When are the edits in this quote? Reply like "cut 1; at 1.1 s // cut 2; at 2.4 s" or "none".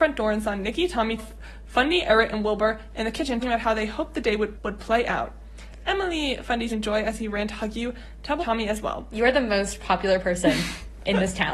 cut 1; at 1.2 s // cut 2; at 3.4 s // cut 3; at 4.6 s // cut 4; at 6.7 s // cut 5; at 8.4 s

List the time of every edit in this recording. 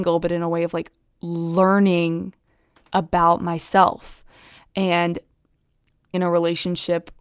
cut 1; at 6.1 s

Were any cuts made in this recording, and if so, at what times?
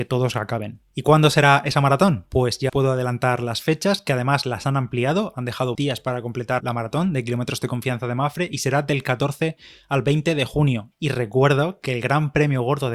cut 1; at 2.7 s // cut 2; at 5.7 s // cut 3; at 6.6 s

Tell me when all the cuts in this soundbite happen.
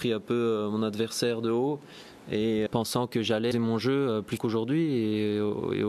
cut 1; at 2.7 s // cut 2; at 3.5 s // cut 3; at 4.4 s

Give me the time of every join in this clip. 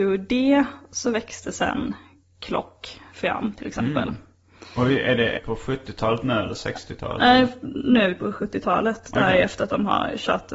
cut 1; at 5.4 s

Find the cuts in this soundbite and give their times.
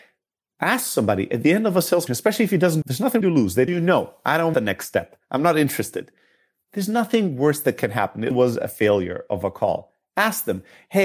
cut 1; at 2.1 s // cut 2; at 2.8 s // cut 3; at 3.2 s // cut 4; at 3.7 s // cut 5; at 4.5 s // cut 6; at 8.3 s

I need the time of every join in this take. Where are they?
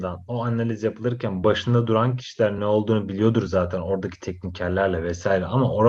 none

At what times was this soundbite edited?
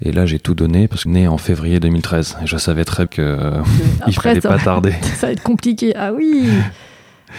cut 1; at 1.1 s // cut 2; at 3.1 s

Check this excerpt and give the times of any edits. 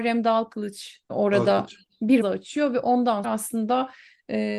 cut 1; at 1.1 s // cut 2; at 2.2 s // cut 3; at 3.2 s

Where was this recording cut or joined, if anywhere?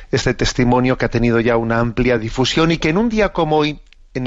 none

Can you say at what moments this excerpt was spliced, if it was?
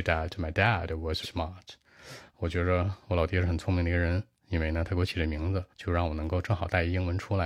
cut 1; at 1.2 s // cut 2; at 5.7 s

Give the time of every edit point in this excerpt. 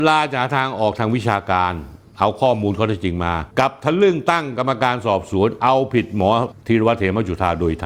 cut 1; at 3.5 s

